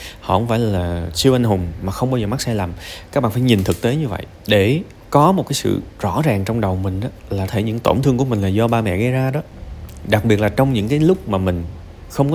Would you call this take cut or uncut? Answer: cut